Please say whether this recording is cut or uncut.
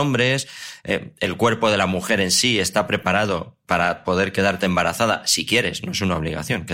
uncut